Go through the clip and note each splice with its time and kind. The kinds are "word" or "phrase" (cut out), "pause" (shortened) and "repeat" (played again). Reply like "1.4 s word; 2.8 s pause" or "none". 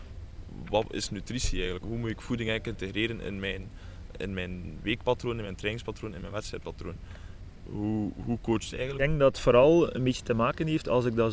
1.8 s word; 4.1 s word; 8.7 s phrase; 9.3 s word